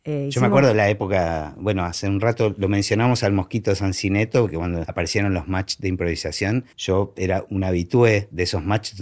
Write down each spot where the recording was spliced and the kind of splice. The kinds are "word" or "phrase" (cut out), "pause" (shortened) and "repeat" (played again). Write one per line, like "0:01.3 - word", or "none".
0:06.7 - pause

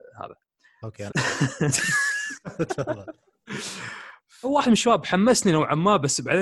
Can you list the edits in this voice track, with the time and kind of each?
0:01.1 - word
0:04.4 - phrase

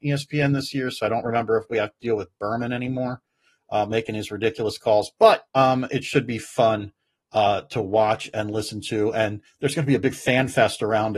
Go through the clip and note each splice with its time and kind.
0:05.5 - pause

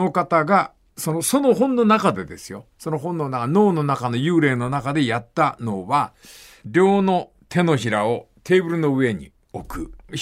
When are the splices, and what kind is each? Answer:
none

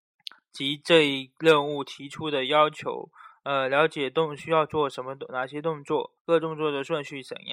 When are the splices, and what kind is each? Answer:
0:06.2 - pause

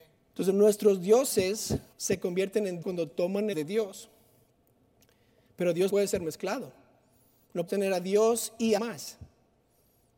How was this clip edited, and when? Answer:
0:01.9 - pause
0:02.8 - word
0:03.5 - phrase
0:05.9 - word
0:07.7 - word
0:08.8 - word

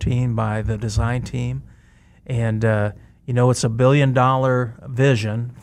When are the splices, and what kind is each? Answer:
none

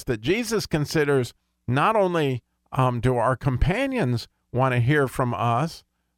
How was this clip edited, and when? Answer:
0:01.4 - pause

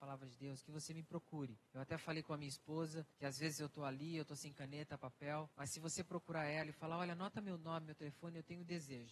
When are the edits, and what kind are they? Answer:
0:01.7 - pause
0:03.1 - pause
0:05.5 - pause

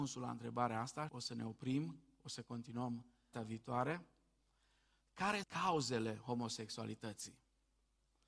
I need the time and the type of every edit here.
0:01.1 - word
0:03.3 - word
0:05.4 - word

